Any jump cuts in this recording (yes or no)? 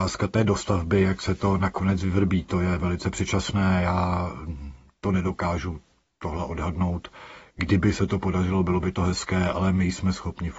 no